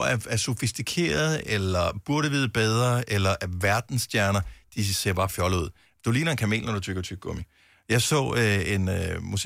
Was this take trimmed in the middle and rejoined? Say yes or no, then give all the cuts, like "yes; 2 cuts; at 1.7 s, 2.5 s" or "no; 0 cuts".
no; 0 cuts